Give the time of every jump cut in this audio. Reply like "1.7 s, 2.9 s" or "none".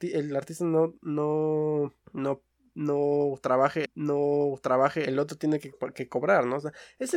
2.0 s, 3.9 s